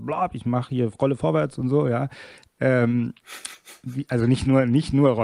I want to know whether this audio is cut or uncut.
uncut